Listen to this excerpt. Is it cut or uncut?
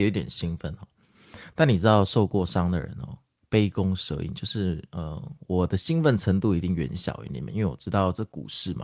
cut